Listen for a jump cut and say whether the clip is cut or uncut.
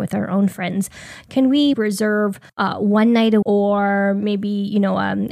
cut